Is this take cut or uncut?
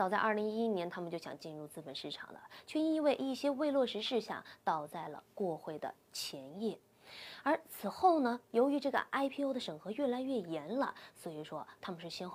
uncut